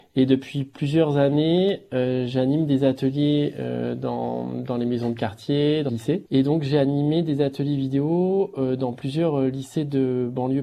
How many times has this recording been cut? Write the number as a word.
one